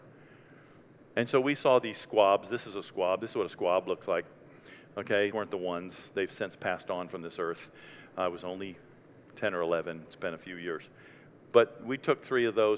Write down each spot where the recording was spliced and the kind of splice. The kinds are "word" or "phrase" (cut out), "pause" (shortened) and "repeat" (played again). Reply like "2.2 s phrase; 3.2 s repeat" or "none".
5.3 s word; 10.1 s word